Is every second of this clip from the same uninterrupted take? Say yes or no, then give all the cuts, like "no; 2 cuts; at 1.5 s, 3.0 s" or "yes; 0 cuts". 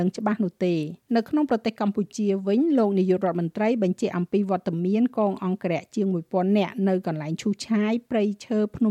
no; 1 cut; at 1.0 s